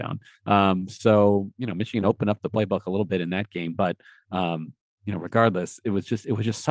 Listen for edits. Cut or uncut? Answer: uncut